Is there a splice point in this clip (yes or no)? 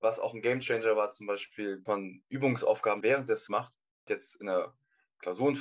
yes